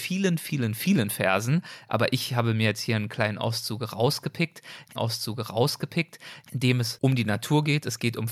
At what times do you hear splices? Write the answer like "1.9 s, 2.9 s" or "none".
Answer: 5.0 s